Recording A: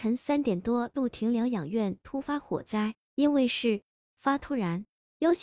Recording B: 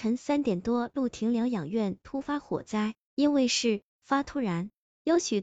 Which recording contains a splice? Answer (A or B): B